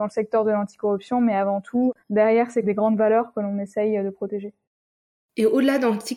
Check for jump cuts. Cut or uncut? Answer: cut